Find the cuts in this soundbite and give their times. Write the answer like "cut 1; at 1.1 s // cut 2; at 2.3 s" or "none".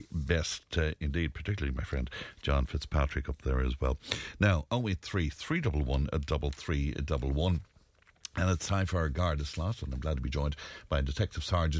none